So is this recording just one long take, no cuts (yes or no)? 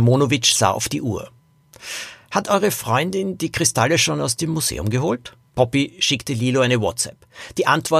no